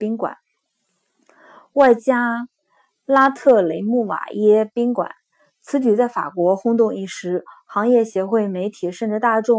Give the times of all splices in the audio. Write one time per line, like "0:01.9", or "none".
none